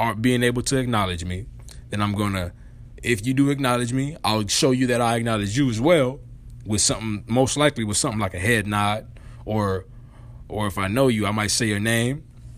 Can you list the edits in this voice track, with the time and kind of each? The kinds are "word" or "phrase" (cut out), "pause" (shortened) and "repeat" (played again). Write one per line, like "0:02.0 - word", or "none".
none